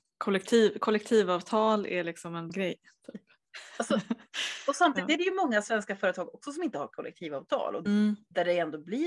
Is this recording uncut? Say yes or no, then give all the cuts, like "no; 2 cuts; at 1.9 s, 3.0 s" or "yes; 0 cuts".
no; 2 cuts; at 2.5 s, 7.8 s